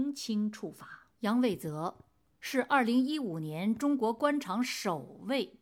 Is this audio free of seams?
no; 1 cut; at 1.1 s

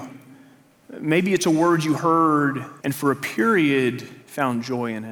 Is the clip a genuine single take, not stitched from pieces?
no; 2 cuts; at 2.8 s, 4.2 s

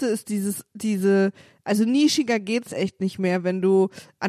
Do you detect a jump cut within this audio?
no; 0 cuts

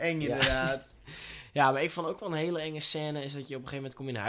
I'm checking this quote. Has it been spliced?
no; 0 cuts

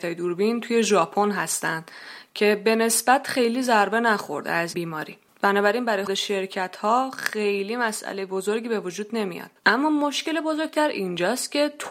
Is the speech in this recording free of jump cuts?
no; 3 cuts; at 4.7 s, 6.1 s, 9.6 s

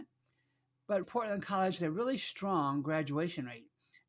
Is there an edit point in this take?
yes; 2 cuts; at 1.0 s, 1.8 s

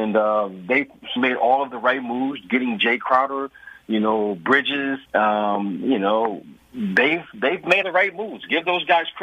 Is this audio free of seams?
no; 4 cuts; at 1.2 s, 5.0 s, 6.6 s, 7.8 s

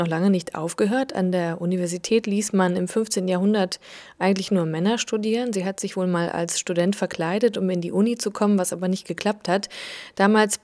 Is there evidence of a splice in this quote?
no; 0 cuts

